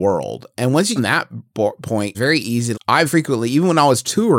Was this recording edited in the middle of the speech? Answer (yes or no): yes